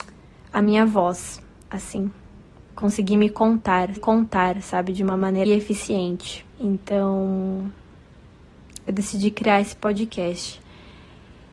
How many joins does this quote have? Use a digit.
4